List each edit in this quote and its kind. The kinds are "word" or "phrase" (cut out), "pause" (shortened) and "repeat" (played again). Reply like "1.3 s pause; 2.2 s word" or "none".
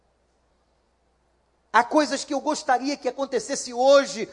none